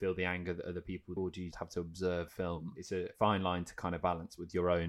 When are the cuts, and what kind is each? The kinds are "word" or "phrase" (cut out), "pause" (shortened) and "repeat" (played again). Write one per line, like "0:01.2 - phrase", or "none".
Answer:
0:01.2 - word
0:01.5 - word
0:02.3 - word